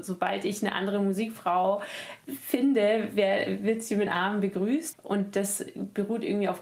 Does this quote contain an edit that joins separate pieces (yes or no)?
yes